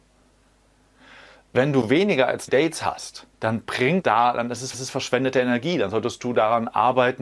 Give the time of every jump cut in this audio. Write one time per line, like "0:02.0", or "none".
0:02.5
0:03.3
0:04.0
0:04.7